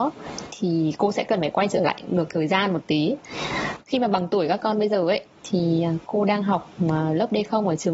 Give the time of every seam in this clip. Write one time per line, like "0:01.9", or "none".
0:06.0